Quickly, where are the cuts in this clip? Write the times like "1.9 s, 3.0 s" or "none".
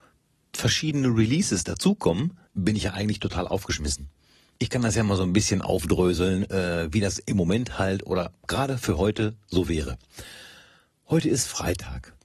2.5 s